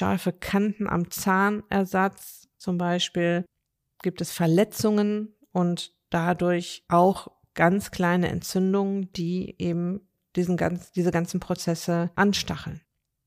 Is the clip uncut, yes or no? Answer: yes